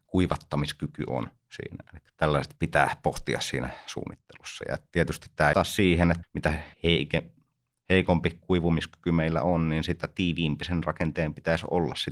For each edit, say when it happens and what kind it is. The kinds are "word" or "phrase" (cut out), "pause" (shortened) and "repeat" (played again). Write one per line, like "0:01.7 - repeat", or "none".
0:02.6 - word
0:05.5 - phrase
0:06.2 - word
0:06.7 - pause